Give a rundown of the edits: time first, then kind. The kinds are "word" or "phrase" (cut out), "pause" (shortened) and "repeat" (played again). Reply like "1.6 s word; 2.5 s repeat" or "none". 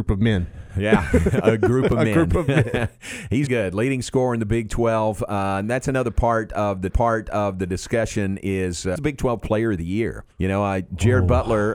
3.5 s word; 6.9 s repeat; 9.0 s word; 10.3 s pause